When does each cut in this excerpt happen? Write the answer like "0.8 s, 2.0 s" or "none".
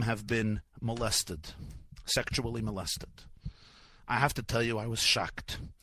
none